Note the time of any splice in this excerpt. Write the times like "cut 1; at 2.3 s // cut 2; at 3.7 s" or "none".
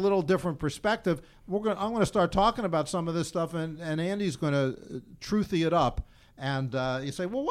none